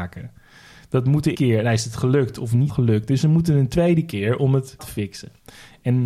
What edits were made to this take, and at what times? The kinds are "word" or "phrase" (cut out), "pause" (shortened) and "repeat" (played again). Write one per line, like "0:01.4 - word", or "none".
0:01.3 - word
0:02.7 - word
0:04.8 - word